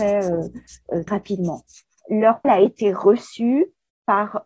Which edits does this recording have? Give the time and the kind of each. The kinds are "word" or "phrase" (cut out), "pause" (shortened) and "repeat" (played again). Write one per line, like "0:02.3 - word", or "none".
0:01.1 - word
0:02.4 - word